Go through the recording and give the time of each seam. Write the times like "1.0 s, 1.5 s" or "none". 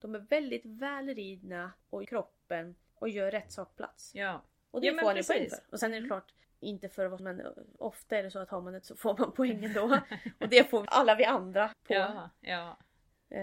2.0 s, 3.7 s, 7.2 s, 8.8 s, 10.9 s, 11.7 s